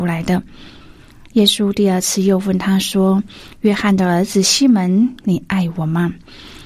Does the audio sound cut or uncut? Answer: uncut